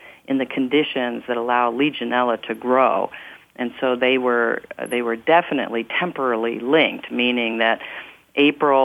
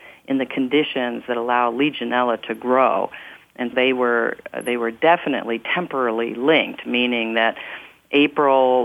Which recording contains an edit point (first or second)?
second